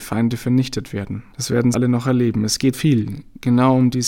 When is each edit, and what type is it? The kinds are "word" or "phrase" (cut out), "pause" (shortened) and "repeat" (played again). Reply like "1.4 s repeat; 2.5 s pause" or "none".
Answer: 1.3 s pause; 1.7 s word; 2.7 s word